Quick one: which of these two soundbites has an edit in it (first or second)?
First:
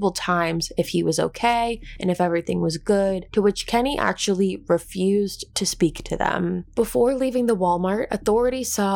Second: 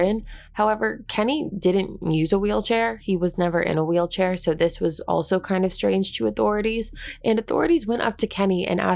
first